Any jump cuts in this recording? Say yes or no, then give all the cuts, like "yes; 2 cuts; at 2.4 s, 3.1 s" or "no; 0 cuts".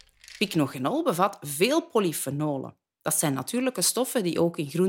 no; 0 cuts